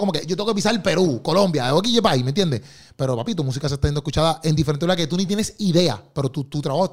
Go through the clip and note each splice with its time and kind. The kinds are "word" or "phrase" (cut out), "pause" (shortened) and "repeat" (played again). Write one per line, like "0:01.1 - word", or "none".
none